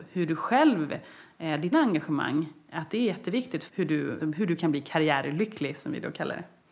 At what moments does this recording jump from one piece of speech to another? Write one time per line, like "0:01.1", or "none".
0:01.7
0:03.7
0:04.2